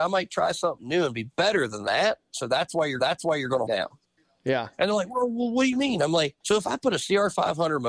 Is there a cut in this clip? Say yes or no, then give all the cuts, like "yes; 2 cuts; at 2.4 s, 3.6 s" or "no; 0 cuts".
yes; 3 cuts; at 3.0 s, 3.7 s, 6.4 s